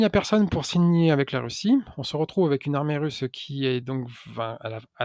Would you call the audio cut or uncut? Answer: uncut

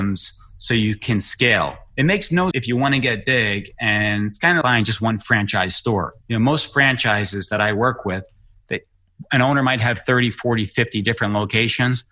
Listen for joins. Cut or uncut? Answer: cut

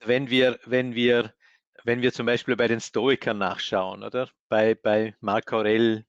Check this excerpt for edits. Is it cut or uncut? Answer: uncut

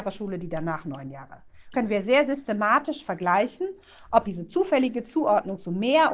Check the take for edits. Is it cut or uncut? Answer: cut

